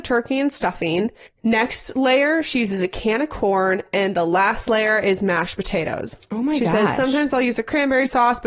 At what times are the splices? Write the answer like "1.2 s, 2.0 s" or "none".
1.3 s